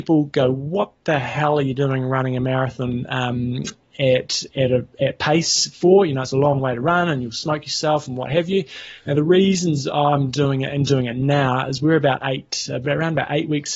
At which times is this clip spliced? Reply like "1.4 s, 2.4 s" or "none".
none